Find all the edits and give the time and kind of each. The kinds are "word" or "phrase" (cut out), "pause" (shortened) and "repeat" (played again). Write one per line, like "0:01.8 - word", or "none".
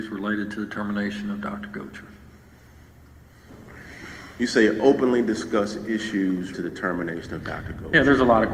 0:04.3 - pause
0:06.5 - word